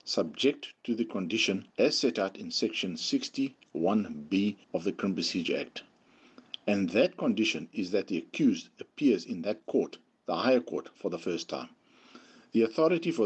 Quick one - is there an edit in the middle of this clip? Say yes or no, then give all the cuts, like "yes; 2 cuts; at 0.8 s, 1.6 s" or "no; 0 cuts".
yes; 2 cuts; at 1.7 s, 4.6 s